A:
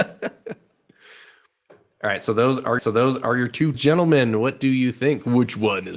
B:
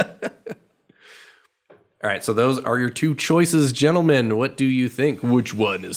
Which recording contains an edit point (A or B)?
A